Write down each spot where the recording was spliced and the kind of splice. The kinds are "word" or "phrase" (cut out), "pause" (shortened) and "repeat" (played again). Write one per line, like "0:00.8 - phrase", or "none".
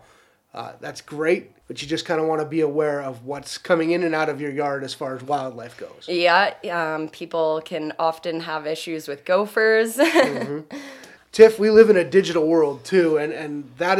0:01.6 - pause